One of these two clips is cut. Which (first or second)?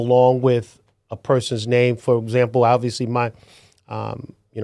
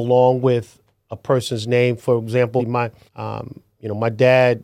second